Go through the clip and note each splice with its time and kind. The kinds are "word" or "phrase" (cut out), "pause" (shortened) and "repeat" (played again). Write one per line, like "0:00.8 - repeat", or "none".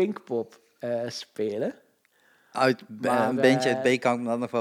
none